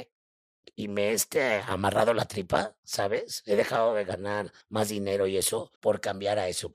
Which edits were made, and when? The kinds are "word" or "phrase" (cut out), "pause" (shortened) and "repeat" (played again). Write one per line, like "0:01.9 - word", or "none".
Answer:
0:04.6 - pause
0:05.8 - pause